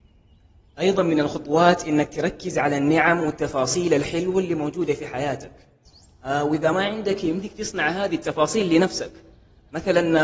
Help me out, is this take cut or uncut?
uncut